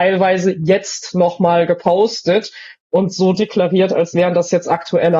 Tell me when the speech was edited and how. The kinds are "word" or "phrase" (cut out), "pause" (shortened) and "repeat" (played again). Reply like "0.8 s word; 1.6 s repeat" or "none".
none